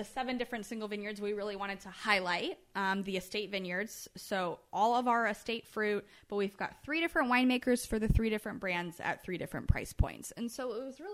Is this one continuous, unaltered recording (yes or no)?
yes